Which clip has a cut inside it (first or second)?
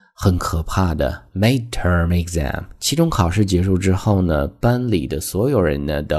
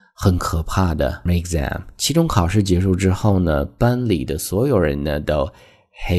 second